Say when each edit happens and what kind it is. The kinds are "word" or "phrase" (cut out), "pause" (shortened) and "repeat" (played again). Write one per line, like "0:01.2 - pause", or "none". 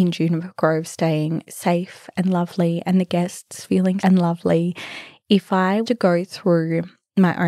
0:04.0 - word
0:05.8 - word